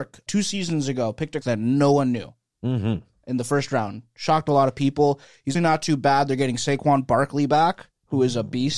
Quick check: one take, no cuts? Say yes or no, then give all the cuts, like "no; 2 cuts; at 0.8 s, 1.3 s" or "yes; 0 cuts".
no; 2 cuts; at 1.4 s, 5.5 s